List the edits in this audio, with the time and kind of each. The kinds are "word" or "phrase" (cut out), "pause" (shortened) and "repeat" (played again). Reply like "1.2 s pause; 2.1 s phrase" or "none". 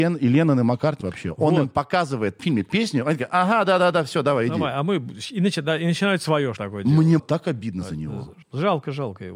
1.0 s phrase; 2.4 s phrase; 6.6 s word; 7.2 s word; 8.4 s pause

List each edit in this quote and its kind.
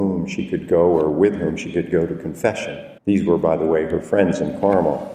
3.0 s pause

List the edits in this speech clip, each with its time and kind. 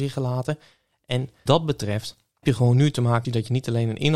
1.5 s word; 2.4 s word; 3.2 s phrase

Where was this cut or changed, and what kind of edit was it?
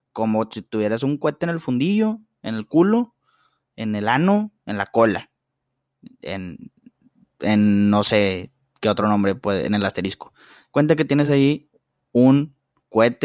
none

